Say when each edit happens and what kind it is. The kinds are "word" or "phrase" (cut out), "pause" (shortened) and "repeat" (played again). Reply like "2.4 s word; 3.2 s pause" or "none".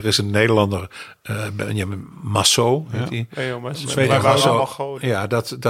none